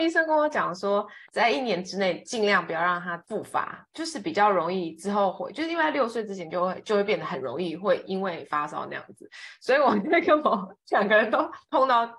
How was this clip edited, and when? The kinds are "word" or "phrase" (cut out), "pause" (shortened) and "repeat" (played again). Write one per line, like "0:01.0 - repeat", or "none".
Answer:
0:01.3 - pause